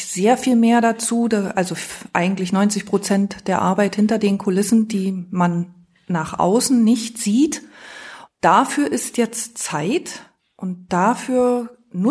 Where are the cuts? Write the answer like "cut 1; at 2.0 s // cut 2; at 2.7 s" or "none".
none